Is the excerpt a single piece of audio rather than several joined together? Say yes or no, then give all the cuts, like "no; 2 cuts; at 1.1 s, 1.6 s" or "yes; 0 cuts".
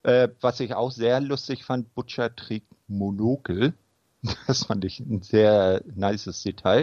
yes; 0 cuts